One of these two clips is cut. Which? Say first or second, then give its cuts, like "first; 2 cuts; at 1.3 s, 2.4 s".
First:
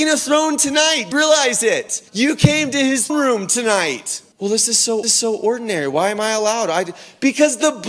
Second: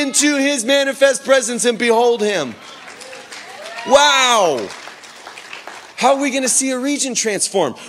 first; 5 cuts; at 1.1 s, 2.1 s, 3.1 s, 4.3 s, 5.0 s